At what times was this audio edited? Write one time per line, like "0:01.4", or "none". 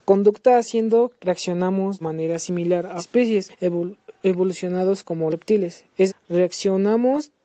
0:01.2
0:02.0
0:03.0
0:03.5
0:05.3
0:06.1